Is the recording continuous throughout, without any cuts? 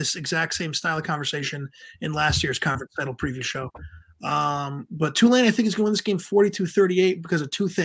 yes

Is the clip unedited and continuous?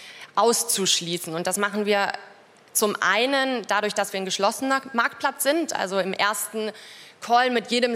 yes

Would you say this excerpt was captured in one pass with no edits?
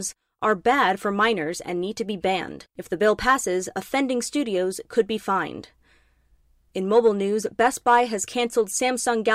no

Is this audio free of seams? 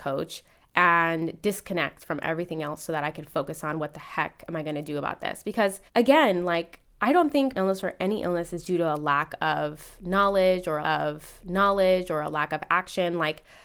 no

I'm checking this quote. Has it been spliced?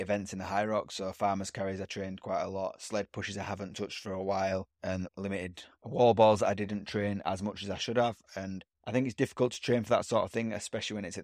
yes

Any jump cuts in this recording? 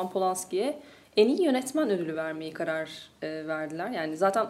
no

